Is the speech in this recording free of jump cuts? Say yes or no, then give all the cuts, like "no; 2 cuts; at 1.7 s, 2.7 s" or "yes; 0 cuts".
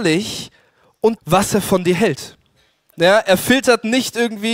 no; 1 cut; at 1.2 s